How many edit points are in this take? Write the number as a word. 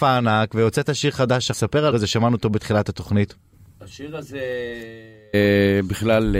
three